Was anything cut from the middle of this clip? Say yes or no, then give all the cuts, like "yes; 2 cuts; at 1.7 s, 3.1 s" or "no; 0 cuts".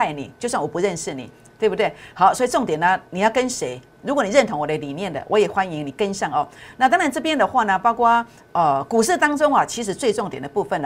no; 0 cuts